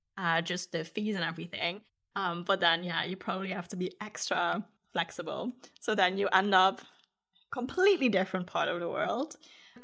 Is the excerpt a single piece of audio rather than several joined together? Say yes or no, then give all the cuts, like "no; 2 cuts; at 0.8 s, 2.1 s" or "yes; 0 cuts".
yes; 0 cuts